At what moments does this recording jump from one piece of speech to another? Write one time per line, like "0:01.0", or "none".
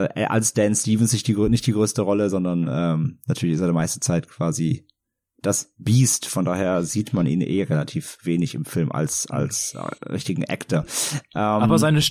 0:10.0